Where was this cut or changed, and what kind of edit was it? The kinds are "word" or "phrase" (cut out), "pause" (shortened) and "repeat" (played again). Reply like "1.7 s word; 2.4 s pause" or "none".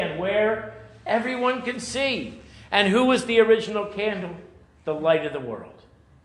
none